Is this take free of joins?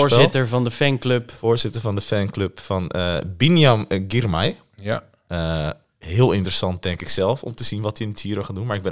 yes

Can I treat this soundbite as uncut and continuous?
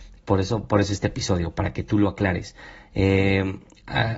yes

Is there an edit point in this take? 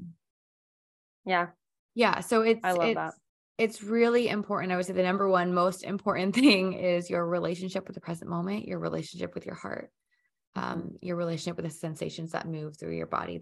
no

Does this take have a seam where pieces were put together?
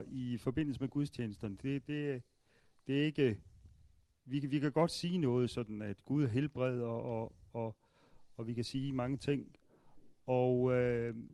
no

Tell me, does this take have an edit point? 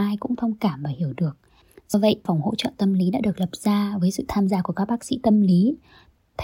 yes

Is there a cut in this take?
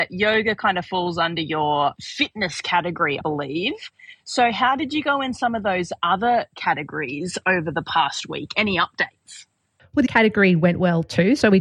yes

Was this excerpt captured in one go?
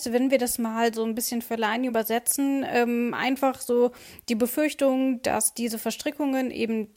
yes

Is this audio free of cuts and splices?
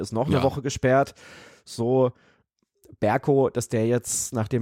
yes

